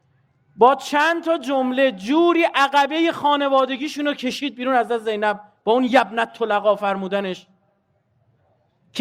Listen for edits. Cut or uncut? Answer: uncut